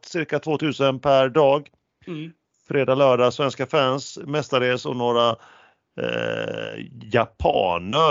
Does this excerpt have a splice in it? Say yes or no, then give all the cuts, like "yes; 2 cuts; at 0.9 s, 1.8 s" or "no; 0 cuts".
no; 0 cuts